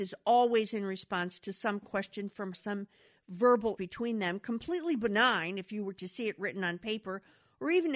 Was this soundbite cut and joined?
yes; 2 cuts; at 2.5 s, 3.8 s

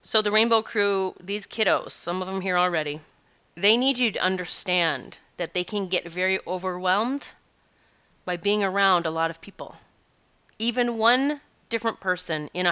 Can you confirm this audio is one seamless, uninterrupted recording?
yes; 0 cuts

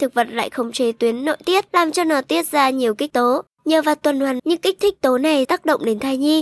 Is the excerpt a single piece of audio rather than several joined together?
no; 5 cuts; at 1.7 s, 3.1 s, 3.5 s, 4.4 s, 5.4 s

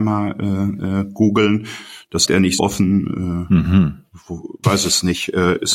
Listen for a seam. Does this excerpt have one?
yes; 3 cuts; at 2.3 s, 2.6 s, 4.6 s

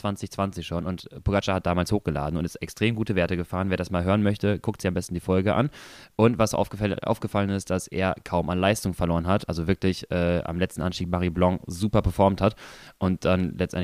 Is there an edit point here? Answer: no; 0 cuts

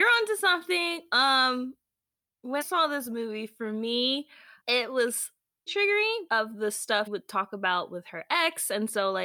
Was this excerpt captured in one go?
no; 5 cuts; at 2.6 s, 4.6 s, 5.7 s, 6.3 s, 7.1 s

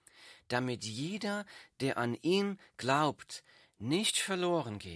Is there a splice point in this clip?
no; 0 cuts

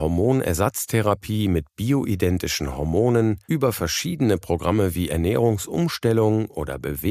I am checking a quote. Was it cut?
yes; 1 cut; at 3.4 s

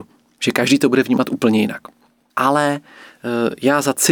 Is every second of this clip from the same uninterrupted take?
yes; 0 cuts

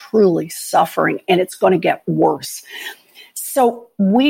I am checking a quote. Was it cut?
no; 0 cuts

